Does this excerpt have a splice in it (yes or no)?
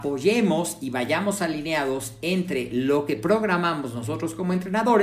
no